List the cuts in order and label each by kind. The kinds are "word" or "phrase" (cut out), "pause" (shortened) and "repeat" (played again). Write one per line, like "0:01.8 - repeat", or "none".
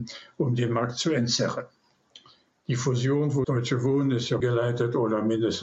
0:03.4 - word
0:04.4 - word